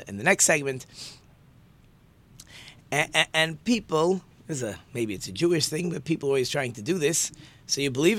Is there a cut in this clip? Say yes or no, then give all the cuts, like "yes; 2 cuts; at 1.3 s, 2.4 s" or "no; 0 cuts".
no; 0 cuts